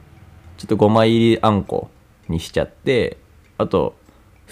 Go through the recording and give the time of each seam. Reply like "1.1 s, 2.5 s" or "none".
none